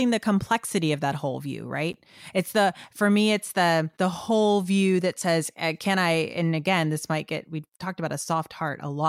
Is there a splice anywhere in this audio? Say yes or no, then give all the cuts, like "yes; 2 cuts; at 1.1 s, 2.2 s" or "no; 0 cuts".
yes; 1 cut; at 3.9 s